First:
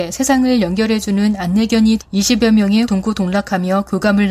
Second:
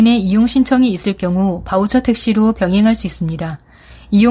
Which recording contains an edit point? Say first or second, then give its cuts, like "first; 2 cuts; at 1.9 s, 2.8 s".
first; 2 cuts; at 2.0 s, 2.8 s